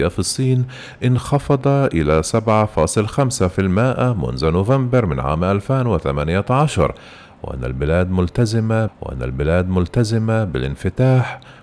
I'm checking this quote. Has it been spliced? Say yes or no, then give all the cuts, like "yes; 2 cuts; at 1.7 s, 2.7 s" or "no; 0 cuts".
yes; 1 cut; at 8.9 s